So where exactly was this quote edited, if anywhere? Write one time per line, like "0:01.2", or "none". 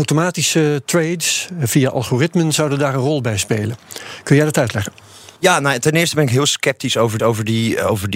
0:05.4
0:07.2